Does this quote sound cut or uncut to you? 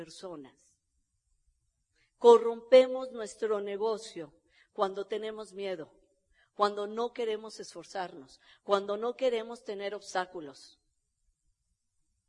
uncut